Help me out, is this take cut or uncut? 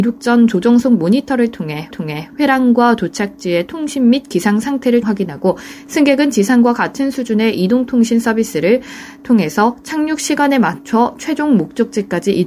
cut